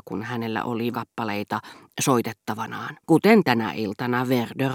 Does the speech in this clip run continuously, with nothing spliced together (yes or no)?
no